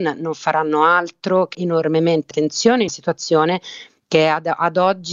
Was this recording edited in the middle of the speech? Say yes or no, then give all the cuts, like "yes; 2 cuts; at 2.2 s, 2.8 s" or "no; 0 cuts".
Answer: yes; 3 cuts; at 1.5 s, 2.3 s, 2.9 s